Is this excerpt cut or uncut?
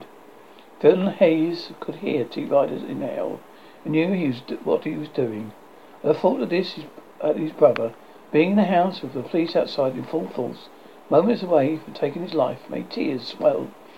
uncut